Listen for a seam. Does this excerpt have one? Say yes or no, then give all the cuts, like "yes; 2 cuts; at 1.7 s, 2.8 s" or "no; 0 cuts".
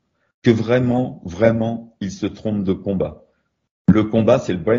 no; 0 cuts